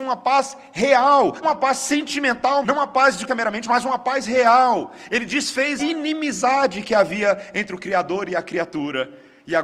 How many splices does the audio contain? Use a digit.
4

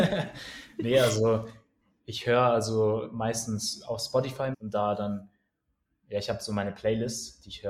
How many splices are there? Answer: 2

